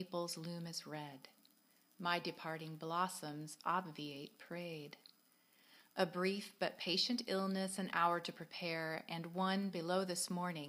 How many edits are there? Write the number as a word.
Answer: zero